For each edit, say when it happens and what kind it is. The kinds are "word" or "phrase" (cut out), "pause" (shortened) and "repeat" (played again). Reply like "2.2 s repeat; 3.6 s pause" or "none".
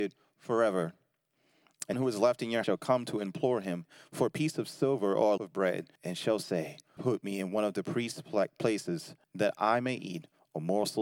1.9 s word; 2.6 s word; 5.4 s word; 6.0 s pause; 7.0 s word; 9.2 s pause